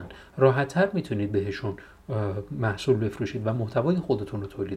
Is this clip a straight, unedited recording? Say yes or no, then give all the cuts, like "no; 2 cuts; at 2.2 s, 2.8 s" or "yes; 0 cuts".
yes; 0 cuts